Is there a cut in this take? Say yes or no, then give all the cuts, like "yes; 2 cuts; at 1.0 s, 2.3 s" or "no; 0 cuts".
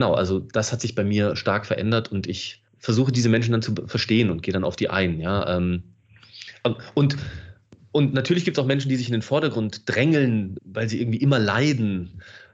yes; 2 cuts; at 2.7 s, 10.6 s